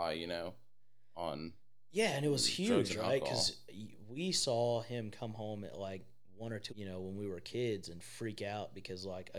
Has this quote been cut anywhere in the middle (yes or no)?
yes